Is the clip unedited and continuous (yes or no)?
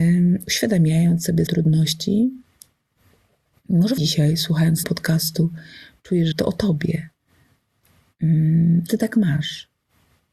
no